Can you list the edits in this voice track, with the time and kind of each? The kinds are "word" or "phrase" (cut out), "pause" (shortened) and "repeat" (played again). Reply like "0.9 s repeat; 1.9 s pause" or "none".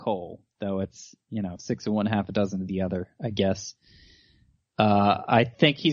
none